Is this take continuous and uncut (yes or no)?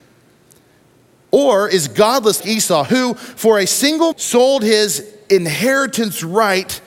no